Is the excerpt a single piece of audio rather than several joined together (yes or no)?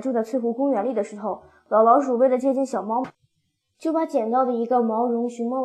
yes